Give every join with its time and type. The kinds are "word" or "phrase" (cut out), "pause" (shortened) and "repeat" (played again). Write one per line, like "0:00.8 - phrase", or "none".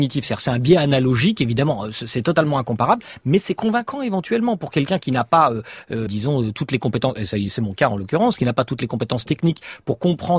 0:06.1 - word